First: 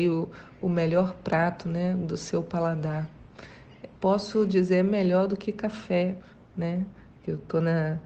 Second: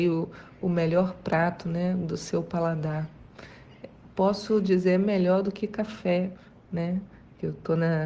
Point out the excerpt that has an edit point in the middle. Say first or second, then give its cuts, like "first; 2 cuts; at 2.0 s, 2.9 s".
first; 1 cut; at 3.9 s